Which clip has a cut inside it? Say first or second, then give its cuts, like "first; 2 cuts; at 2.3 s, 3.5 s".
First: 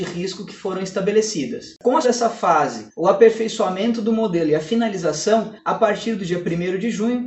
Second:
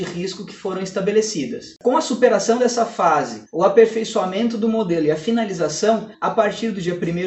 first; 1 cut; at 2.0 s